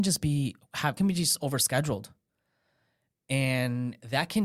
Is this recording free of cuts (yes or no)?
no